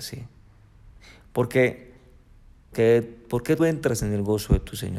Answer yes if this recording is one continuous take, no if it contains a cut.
no